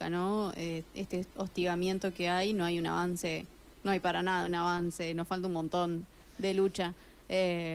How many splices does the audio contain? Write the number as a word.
zero